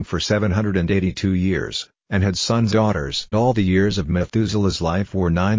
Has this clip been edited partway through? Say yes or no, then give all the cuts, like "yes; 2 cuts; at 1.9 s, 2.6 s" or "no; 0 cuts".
yes; 2 cuts; at 2.7 s, 3.3 s